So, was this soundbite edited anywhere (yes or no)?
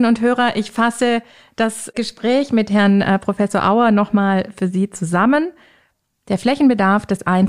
no